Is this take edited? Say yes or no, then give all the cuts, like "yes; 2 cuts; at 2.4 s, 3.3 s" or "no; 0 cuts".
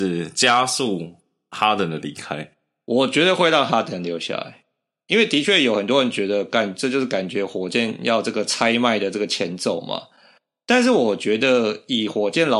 no; 0 cuts